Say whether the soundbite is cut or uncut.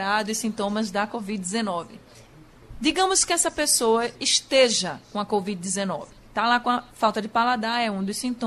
uncut